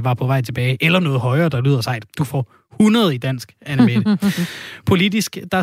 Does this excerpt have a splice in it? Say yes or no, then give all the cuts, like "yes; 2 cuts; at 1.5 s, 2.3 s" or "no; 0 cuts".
no; 0 cuts